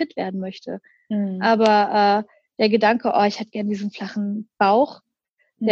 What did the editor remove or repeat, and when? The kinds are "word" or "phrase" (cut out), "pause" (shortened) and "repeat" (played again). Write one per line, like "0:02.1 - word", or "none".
none